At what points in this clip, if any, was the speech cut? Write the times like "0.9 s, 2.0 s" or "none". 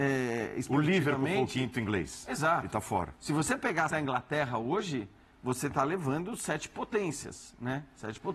3.9 s